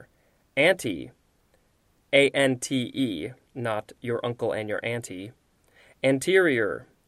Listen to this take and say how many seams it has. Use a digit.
0